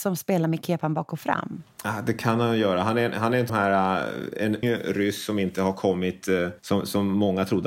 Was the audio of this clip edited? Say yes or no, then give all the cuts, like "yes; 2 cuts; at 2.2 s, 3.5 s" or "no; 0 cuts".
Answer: yes; 3 cuts; at 3.5 s, 4.6 s, 6.6 s